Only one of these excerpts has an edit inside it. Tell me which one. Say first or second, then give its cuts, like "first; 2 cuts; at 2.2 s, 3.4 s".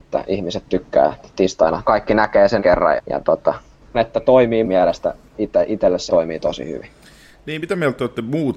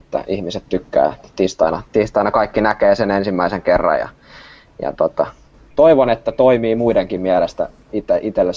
first; 6 cuts; at 1.8 s, 2.6 s, 3.0 s, 3.9 s, 4.6 s, 6.1 s